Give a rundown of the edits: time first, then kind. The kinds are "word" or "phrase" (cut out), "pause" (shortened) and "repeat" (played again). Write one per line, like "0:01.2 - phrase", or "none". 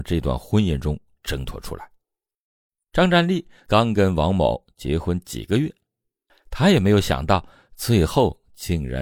none